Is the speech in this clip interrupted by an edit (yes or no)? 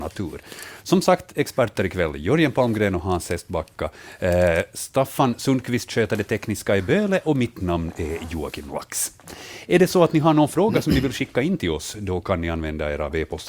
no